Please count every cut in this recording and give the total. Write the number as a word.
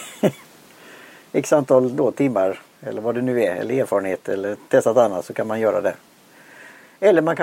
zero